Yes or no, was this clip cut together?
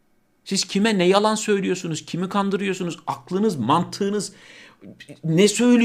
no